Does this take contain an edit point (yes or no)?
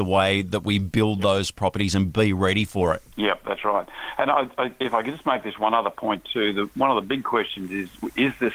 yes